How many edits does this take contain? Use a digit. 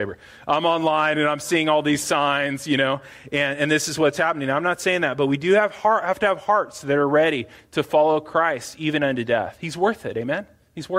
0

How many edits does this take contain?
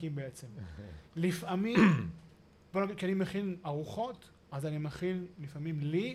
1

